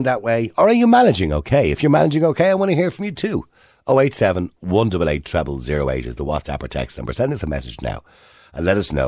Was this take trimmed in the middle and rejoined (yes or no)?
no